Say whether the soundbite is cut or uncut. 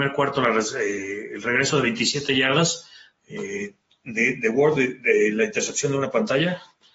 uncut